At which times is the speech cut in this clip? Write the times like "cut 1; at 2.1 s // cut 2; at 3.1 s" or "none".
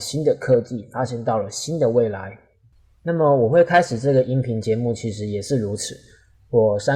none